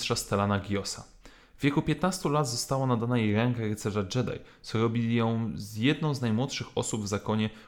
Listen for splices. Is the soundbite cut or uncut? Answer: uncut